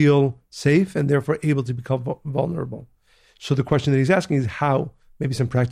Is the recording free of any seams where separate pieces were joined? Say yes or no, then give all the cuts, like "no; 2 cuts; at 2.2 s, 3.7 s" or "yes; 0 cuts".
yes; 0 cuts